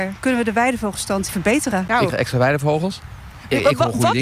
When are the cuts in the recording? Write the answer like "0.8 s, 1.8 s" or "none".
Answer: 1.3 s, 2.1 s